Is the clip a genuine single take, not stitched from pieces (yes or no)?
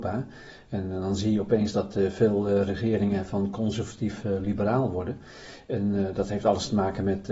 yes